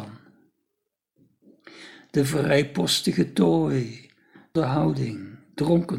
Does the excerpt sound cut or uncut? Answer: cut